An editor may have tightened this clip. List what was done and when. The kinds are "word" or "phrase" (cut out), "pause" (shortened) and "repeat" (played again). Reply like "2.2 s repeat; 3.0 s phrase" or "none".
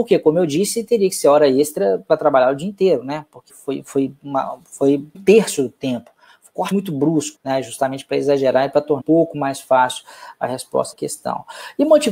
3.5 s word; 5.1 s word; 6.7 s word; 7.3 s word; 9.0 s word; 10.9 s word